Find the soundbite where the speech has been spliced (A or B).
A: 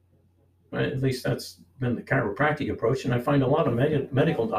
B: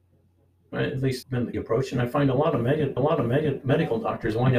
B